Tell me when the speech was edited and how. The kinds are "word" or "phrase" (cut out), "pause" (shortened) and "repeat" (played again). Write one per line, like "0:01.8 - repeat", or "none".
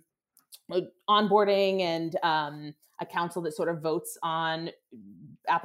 none